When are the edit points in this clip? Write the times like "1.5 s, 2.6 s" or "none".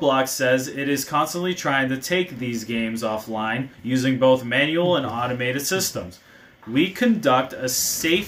3.7 s

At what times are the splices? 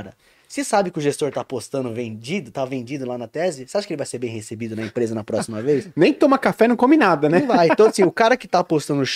none

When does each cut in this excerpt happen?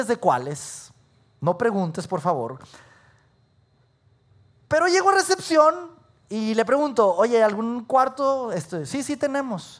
none

